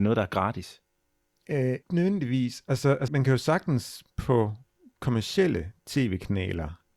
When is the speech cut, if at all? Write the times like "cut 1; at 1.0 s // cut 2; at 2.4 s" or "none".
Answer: cut 1; at 1.8 s // cut 2; at 3.1 s